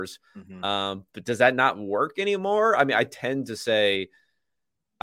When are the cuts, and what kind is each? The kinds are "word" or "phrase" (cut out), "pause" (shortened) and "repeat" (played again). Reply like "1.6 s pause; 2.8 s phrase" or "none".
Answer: none